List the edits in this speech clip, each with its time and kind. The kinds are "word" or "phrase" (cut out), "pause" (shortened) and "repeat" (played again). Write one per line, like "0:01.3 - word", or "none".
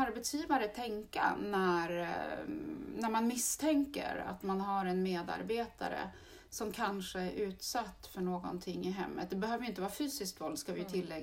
none